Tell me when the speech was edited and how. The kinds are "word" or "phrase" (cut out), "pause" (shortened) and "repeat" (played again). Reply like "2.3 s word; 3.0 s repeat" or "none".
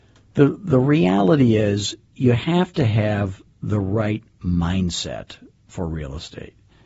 none